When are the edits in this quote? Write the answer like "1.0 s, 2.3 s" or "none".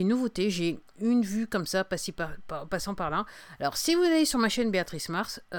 none